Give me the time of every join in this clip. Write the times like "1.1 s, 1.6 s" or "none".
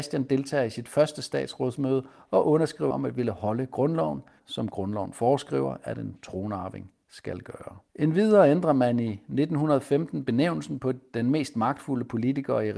2.9 s, 4.4 s, 7.9 s